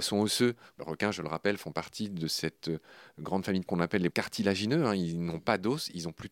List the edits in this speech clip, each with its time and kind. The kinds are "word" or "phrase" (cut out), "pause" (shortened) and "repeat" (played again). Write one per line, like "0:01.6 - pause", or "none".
0:03.7 - word
0:04.1 - word